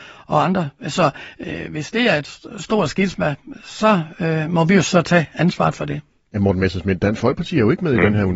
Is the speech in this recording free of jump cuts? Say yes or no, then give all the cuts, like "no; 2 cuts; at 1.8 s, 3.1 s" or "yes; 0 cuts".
yes; 0 cuts